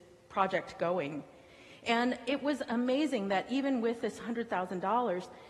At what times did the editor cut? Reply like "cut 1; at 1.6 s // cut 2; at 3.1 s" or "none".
none